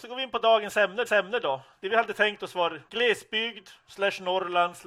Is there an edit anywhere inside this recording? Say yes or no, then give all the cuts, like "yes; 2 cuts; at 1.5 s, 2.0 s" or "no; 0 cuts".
yes; 2 cuts; at 1.1 s, 2.9 s